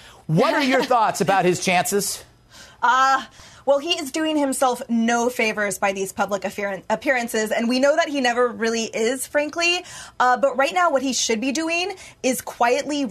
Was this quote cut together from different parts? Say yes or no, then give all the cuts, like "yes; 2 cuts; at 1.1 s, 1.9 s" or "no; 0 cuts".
no; 0 cuts